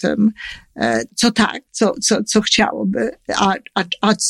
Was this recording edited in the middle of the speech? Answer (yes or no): yes